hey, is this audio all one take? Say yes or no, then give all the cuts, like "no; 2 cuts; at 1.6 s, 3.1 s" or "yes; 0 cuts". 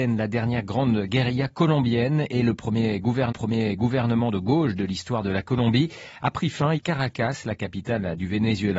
no; 2 cuts; at 3.3 s, 6.8 s